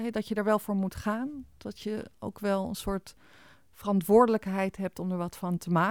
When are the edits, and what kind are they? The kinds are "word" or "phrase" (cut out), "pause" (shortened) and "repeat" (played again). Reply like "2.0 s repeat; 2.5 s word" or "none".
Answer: none

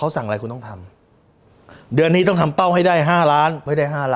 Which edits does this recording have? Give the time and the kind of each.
none

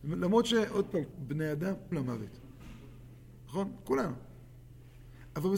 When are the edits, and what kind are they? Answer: 1.1 s word; 1.9 s phrase

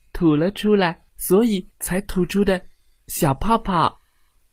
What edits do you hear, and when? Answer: 1.1 s pause; 1.7 s pause

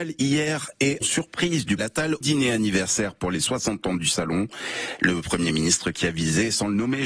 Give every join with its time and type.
1.0 s word; 1.8 s phrase; 2.2 s word

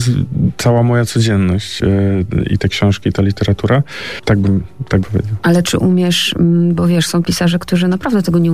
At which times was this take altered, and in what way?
5.0 s word; 5.6 s word; 7.2 s word

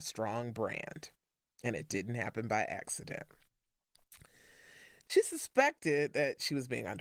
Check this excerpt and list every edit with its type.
none

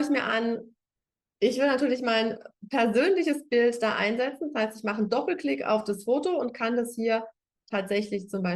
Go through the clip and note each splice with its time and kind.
none

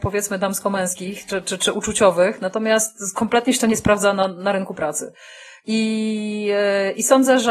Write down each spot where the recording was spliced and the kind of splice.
none

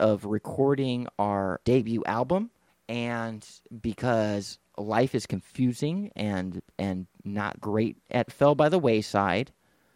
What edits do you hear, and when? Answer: 1.6 s word; 2.7 s pause; 7.6 s word; 8.3 s phrase

